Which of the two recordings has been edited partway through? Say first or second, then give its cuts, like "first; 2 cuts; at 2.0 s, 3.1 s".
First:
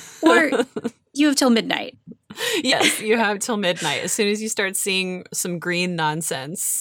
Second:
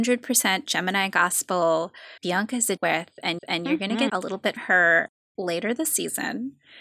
second; 5 cuts; at 2.2 s, 2.8 s, 3.4 s, 4.1 s, 4.6 s